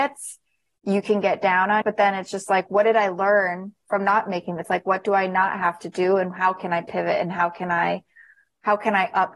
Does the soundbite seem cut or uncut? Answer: cut